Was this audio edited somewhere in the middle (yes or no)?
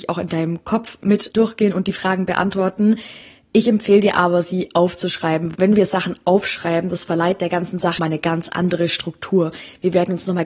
yes